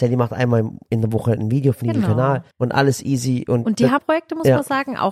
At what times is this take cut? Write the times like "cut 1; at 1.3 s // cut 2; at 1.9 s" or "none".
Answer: cut 1; at 1.8 s // cut 2; at 2.5 s // cut 3; at 4.0 s